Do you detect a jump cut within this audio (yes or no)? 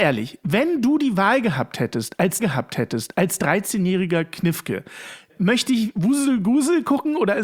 yes